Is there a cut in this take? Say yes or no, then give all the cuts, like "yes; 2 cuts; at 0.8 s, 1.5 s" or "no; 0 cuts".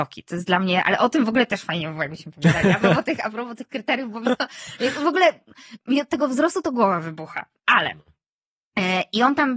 no; 0 cuts